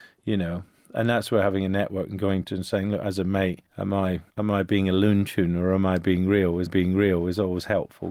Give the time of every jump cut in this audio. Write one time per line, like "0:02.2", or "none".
0:02.4
0:03.7
0:04.3
0:06.7